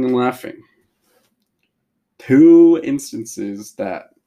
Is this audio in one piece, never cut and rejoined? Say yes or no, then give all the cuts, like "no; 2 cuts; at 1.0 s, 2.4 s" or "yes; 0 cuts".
yes; 0 cuts